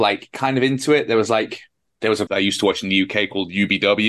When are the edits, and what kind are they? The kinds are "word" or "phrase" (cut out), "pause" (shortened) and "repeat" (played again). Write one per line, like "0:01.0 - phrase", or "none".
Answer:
0:02.3 - phrase